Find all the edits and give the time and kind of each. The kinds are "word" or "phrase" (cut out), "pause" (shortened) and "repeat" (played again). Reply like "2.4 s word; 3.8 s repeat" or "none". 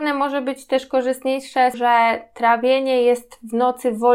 1.7 s phrase